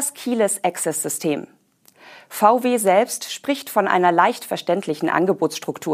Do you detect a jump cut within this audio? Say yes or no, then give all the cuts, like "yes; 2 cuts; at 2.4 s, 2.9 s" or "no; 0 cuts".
no; 0 cuts